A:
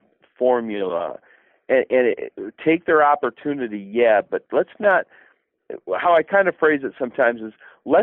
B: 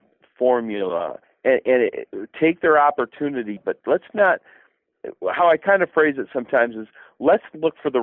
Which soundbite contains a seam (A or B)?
B